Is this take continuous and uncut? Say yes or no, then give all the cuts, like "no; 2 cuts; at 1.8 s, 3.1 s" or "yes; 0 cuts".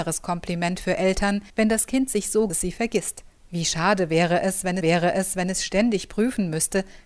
no; 4 cuts; at 1.5 s, 2.5 s, 3.4 s, 4.8 s